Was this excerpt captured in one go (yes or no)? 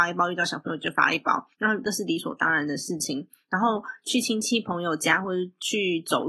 no